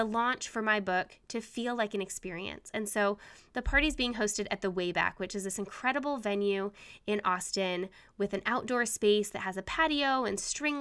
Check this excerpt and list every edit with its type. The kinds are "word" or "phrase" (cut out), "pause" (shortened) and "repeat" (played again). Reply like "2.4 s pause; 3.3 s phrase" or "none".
none